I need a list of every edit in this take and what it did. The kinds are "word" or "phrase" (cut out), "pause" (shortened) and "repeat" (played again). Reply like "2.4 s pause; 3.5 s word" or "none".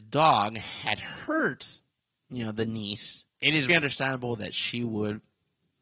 2.1 s pause; 3.3 s pause; 3.7 s word